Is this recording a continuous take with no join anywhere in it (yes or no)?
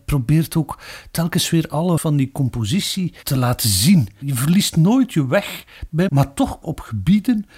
no